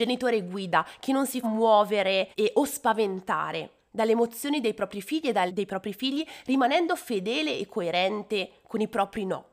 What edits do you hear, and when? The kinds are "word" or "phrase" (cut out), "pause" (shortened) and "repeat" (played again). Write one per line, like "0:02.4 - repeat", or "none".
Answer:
0:01.4 - word
0:02.3 - pause
0:05.5 - phrase